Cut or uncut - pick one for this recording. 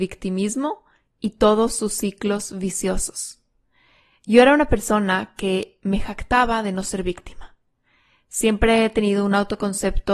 uncut